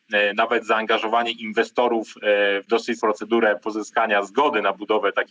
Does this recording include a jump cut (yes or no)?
yes